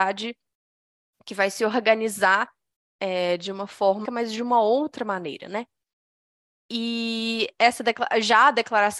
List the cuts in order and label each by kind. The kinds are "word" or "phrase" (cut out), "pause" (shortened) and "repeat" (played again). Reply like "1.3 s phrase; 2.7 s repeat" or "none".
4.0 s word